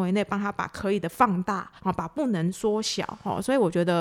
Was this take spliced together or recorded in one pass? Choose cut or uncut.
cut